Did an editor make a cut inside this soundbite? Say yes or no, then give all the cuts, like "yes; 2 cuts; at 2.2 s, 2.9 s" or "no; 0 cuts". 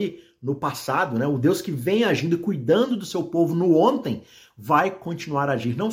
no; 0 cuts